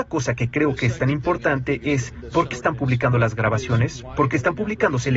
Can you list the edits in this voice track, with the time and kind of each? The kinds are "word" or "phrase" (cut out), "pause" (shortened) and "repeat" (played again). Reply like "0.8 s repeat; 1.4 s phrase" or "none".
2.5 s word

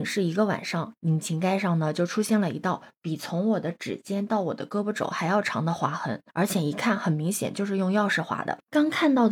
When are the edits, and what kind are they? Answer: 6.3 s pause

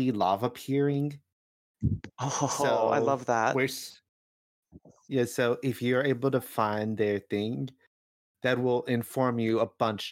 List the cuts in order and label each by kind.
none

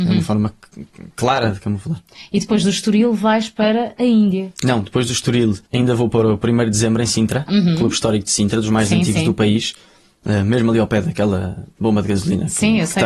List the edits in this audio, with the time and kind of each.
5.6 s pause

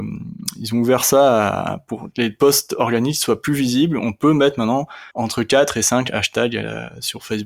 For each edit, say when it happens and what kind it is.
5.1 s pause

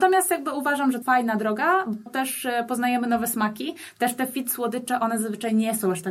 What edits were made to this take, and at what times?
1.0 s phrase; 2.1 s word

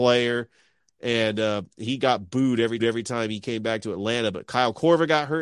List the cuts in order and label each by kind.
2.8 s repeat

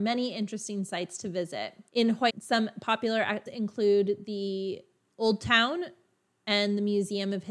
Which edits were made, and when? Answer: 1.9 s pause; 2.3 s word; 3.5 s word

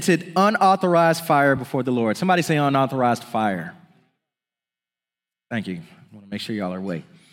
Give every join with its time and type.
none

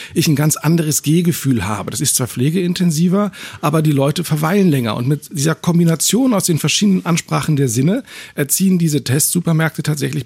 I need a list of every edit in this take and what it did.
none

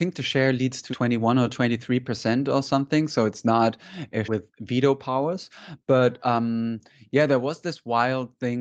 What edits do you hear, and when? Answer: 0.9 s word; 4.2 s word

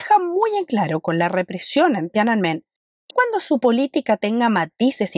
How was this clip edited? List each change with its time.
3.1 s word

